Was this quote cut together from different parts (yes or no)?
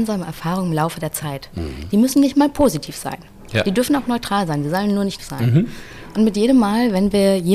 yes